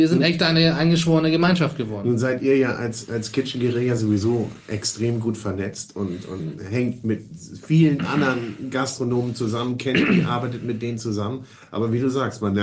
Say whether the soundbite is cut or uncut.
uncut